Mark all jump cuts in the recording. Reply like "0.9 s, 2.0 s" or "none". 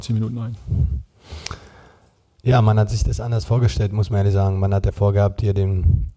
none